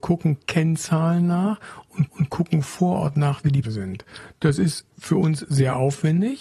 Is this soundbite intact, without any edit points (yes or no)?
no